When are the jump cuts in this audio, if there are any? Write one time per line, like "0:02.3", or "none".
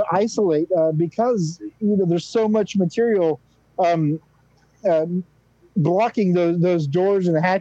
none